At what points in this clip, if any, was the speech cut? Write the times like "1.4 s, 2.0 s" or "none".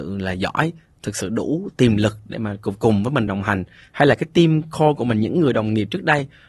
none